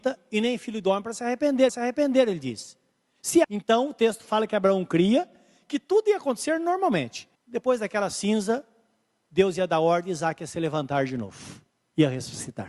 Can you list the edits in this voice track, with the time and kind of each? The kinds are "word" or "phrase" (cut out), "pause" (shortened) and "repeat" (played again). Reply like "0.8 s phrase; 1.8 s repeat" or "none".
1.7 s repeat; 3.4 s word; 7.3 s pause